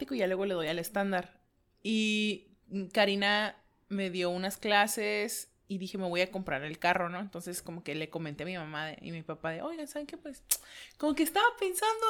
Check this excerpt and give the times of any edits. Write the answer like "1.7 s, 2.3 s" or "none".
none